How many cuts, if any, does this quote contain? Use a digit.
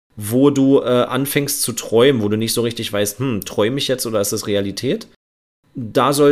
0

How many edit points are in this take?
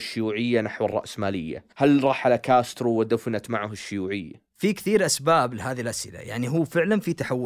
1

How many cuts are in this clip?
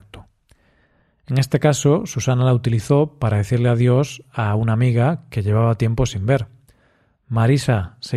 0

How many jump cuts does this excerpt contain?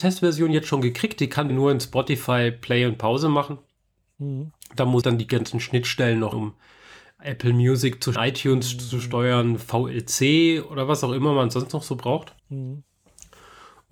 5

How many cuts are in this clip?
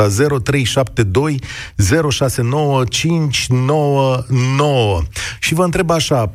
0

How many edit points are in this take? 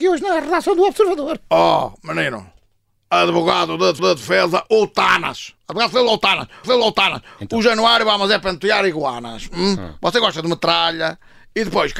3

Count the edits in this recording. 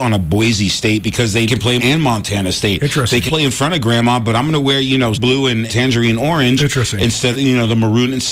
6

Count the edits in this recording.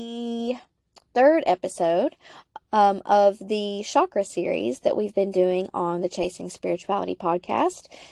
0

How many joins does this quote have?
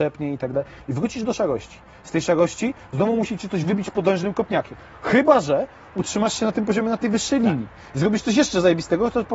0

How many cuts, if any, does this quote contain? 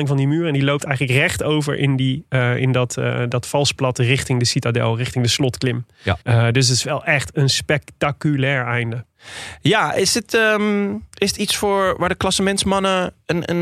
1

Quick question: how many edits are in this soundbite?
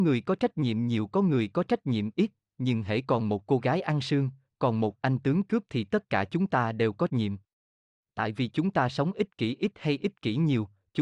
1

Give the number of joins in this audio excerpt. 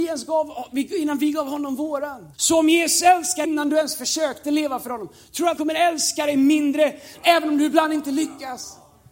4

